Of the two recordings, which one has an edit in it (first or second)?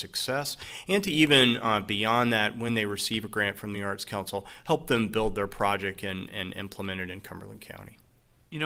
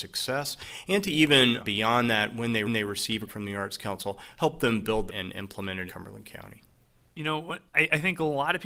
second